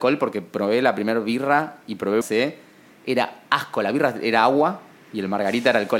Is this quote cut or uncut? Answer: cut